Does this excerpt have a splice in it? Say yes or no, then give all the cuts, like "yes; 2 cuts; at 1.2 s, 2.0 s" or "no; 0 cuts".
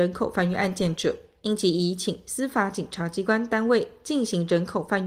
no; 0 cuts